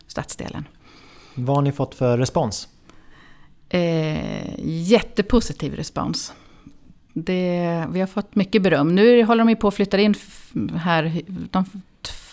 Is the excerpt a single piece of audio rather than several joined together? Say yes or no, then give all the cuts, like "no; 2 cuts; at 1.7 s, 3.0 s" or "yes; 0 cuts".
yes; 0 cuts